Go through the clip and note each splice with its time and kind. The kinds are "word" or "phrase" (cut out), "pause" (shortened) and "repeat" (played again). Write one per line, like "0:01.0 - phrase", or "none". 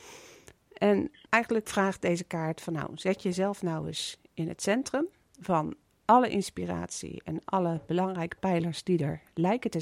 none